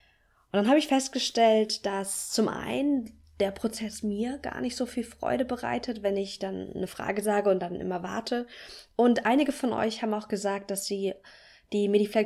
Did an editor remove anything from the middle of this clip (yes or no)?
no